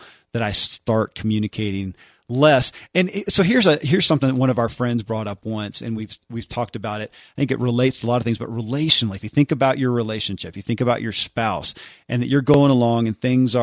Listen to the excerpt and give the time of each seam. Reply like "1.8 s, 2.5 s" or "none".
none